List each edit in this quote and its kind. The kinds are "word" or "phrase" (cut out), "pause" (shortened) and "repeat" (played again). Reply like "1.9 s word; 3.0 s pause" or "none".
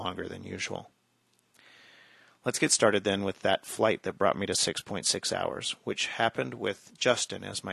none